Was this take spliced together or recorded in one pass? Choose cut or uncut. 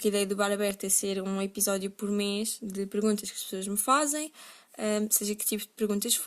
uncut